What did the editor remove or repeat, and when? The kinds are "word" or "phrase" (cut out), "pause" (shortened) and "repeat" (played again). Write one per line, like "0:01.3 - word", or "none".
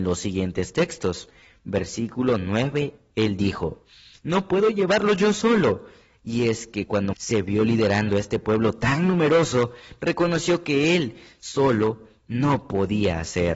0:07.1 - word